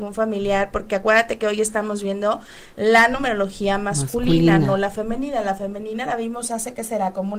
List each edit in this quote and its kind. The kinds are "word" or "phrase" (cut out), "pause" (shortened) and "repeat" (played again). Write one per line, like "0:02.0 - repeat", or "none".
none